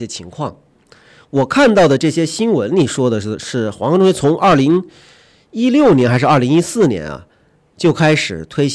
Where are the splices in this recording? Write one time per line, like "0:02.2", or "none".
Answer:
none